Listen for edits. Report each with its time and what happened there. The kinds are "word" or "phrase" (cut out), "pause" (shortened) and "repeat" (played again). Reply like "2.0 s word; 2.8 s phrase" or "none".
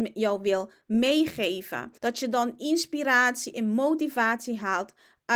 2.0 s pause